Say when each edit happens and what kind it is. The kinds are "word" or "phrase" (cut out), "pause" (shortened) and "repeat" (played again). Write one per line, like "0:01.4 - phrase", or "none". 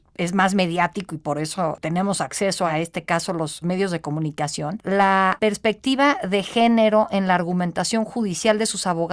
none